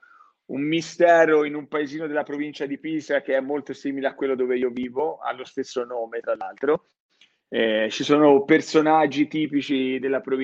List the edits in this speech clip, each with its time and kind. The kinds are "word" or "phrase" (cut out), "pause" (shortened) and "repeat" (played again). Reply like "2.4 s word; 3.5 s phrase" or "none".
none

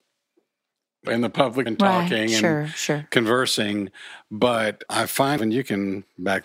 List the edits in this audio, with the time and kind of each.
1.1 s word; 1.7 s word; 4.9 s word; 5.4 s word

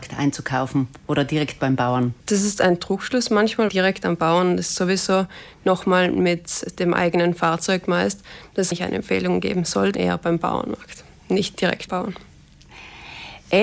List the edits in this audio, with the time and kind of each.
2.2 s pause; 3.7 s word; 8.7 s phrase; 9.9 s word; 11.9 s word

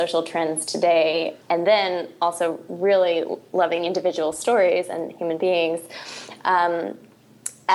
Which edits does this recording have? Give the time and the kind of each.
1.4 s pause

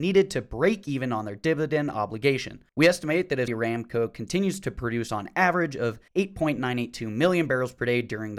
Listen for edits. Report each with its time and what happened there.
2.7 s pause; 3.5 s word; 6.1 s pause

